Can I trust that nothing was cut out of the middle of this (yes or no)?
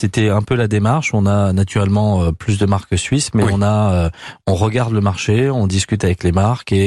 yes